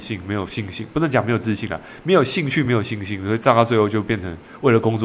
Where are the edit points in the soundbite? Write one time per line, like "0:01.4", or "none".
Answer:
none